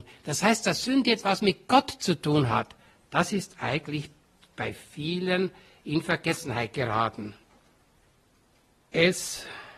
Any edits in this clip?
no; 0 cuts

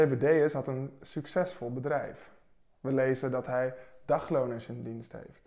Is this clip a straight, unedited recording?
yes; 0 cuts

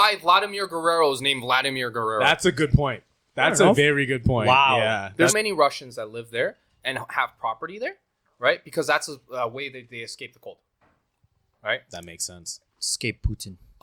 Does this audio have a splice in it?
yes; 1 cut; at 5.3 s

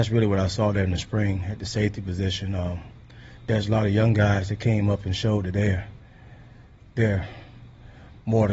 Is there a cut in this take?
no; 0 cuts

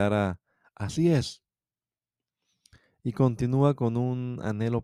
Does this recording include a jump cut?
no; 0 cuts

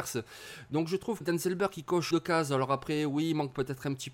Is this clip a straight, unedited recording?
no; 2 cuts; at 1.2 s, 2.1 s

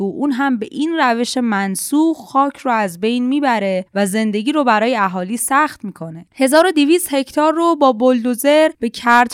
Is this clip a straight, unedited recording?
yes; 0 cuts

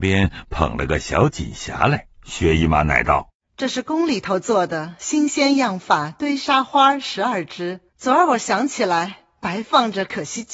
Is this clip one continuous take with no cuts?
no; 2 cuts; at 2.2 s, 7.9 s

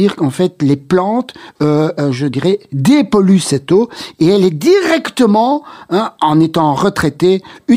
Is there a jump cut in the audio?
no; 0 cuts

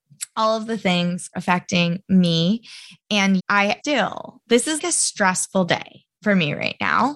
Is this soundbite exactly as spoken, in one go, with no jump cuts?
no; 4 cuts; at 1.3 s, 3.4 s, 3.8 s, 4.8 s

